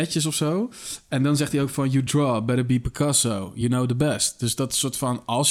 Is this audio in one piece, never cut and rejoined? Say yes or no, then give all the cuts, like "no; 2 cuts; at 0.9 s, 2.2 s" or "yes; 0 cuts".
yes; 0 cuts